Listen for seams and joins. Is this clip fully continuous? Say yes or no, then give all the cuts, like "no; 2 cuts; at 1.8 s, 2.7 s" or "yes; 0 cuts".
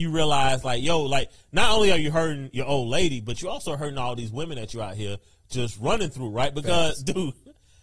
yes; 0 cuts